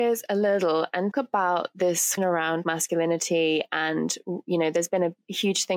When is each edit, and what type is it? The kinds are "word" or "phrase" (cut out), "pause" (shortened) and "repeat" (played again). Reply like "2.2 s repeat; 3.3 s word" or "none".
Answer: 1.1 s word; 2.2 s word; 2.6 s word